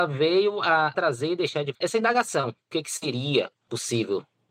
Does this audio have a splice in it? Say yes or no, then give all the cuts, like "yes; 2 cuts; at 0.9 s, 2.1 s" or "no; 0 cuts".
yes; 1 cut; at 1.7 s